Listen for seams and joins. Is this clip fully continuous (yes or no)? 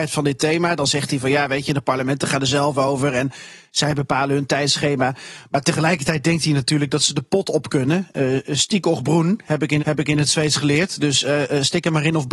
no